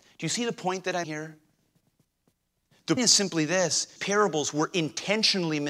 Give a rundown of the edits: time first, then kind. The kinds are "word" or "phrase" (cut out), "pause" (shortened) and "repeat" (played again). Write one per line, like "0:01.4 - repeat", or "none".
0:01.0 - word
0:03.0 - word
0:04.0 - word